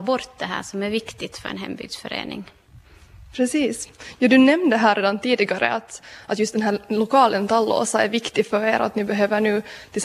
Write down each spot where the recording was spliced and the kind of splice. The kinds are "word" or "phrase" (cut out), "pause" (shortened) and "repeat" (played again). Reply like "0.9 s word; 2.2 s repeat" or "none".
none